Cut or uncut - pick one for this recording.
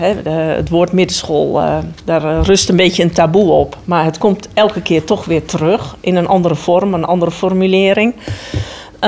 uncut